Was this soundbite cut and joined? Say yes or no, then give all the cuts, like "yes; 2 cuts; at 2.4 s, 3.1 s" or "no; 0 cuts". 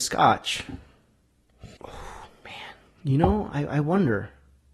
yes; 2 cuts; at 1.8 s, 2.9 s